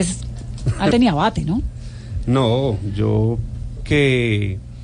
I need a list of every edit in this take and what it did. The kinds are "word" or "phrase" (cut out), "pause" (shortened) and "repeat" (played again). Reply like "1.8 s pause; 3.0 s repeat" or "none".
0.9 s word; 3.8 s word